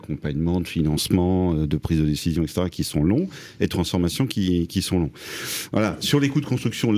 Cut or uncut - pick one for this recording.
uncut